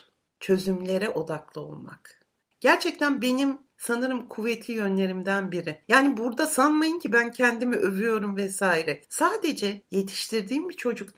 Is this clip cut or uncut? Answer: uncut